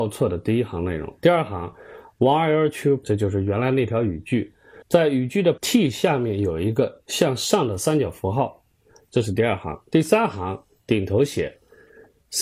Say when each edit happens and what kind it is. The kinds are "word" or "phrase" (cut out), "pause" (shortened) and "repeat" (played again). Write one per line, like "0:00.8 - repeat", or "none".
0:03.0 - word
0:04.8 - pause
0:05.6 - phrase